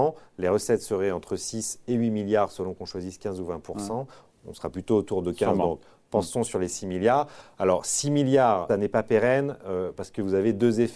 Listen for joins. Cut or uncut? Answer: cut